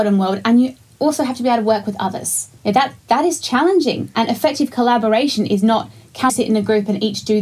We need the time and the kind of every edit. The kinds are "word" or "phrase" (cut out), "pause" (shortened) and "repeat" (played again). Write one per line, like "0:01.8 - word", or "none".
0:02.6 - pause
0:03.0 - pause
0:06.3 - word